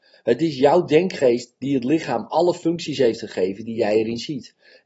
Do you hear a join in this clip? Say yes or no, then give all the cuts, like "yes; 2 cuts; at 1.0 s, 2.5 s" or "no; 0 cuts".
no; 0 cuts